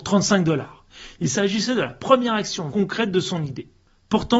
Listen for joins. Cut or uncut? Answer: cut